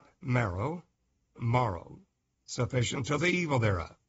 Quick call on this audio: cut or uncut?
cut